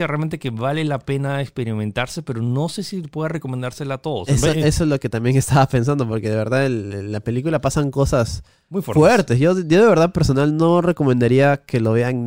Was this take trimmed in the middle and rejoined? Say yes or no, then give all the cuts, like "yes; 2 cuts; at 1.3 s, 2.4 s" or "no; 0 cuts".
no; 0 cuts